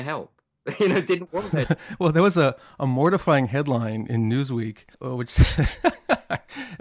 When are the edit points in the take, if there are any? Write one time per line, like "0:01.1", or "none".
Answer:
0:04.9